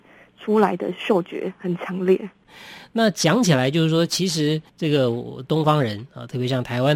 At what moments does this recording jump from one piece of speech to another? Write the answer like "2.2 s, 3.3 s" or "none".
4.7 s

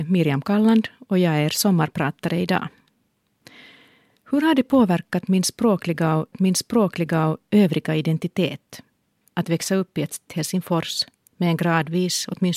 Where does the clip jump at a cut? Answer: 6.3 s, 10.3 s

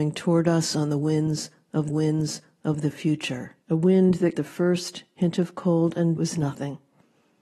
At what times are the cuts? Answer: 1.9 s, 3.6 s, 4.3 s, 6.2 s

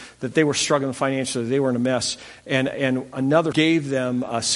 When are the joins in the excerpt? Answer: 3.5 s

